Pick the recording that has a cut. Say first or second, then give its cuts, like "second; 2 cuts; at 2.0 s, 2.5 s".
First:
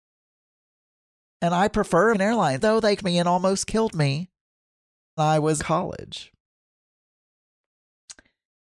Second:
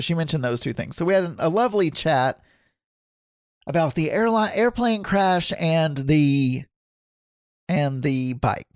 first; 5 cuts; at 2.1 s, 2.6 s, 3.0 s, 5.2 s, 5.6 s